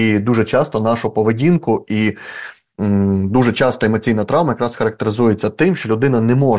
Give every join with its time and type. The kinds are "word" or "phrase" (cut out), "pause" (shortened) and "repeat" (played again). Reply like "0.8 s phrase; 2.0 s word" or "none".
none